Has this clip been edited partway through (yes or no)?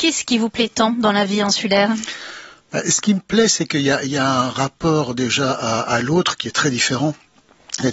no